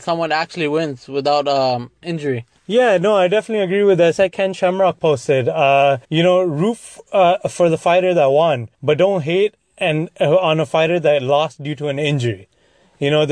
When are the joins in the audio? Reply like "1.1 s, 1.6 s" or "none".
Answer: 2.6 s, 6.0 s, 8.7 s